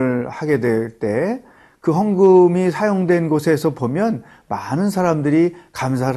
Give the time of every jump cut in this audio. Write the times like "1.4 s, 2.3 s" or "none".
none

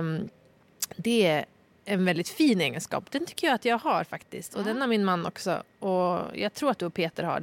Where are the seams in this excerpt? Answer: none

